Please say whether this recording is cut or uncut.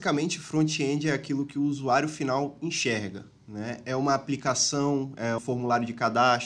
cut